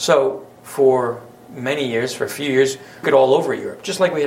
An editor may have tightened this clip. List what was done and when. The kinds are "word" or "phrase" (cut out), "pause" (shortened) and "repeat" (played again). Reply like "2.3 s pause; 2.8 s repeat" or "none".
3.0 s phrase